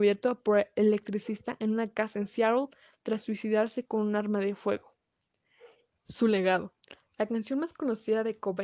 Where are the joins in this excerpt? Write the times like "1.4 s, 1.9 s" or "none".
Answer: 5.9 s